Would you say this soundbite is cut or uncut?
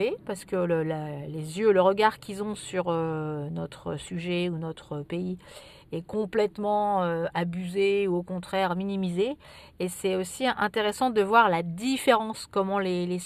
uncut